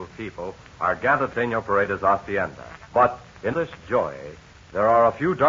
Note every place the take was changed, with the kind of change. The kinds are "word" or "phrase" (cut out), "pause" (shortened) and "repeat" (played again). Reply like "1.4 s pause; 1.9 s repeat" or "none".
1.3 s phrase; 2.8 s pause; 3.5 s word